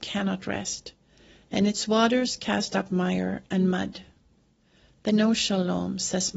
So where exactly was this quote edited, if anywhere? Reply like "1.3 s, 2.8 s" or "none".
5.1 s